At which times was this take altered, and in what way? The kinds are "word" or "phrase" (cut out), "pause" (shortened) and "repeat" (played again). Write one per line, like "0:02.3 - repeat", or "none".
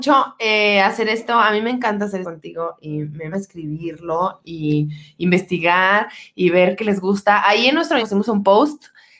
0:02.2 - word
0:03.3 - word
0:08.0 - word